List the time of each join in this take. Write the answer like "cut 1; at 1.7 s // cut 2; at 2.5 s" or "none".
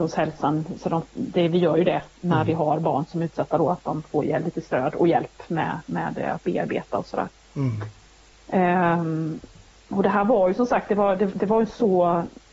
none